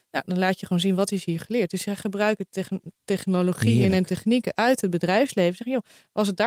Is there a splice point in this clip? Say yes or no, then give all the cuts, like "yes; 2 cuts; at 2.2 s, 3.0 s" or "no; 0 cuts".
no; 0 cuts